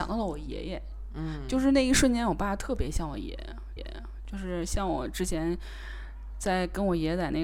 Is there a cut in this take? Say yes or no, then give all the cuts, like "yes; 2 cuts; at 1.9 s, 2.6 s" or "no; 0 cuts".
yes; 1 cut; at 3.8 s